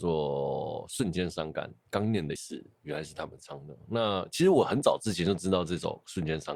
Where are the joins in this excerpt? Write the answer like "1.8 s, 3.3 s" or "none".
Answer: 2.4 s

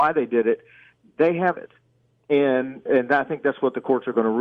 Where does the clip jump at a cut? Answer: 1.6 s, 2.9 s

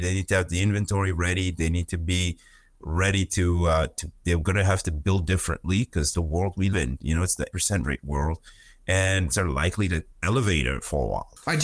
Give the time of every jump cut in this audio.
6.1 s, 6.7 s, 7.5 s, 7.8 s, 9.3 s, 10.1 s

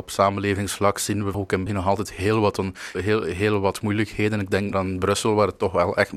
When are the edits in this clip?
1.3 s, 1.7 s, 2.9 s, 4.7 s

